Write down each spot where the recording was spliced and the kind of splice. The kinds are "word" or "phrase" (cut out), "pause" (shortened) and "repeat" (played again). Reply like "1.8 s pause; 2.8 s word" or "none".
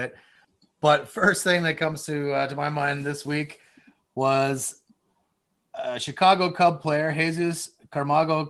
none